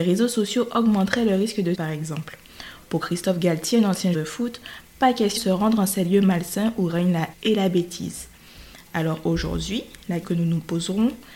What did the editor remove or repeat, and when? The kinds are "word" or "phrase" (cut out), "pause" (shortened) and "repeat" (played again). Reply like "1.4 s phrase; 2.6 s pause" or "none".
1.7 s word; 4.1 s word; 5.4 s word; 7.3 s word; 10.2 s word